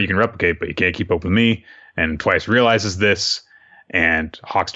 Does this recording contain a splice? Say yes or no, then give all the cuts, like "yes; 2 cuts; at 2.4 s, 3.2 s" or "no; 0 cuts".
no; 0 cuts